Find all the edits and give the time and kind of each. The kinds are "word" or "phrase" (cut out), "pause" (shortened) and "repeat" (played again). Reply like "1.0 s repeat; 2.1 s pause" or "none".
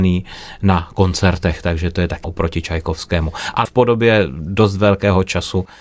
2.2 s word; 3.7 s word